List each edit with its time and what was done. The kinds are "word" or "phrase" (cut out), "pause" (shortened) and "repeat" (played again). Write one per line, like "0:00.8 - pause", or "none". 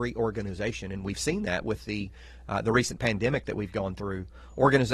none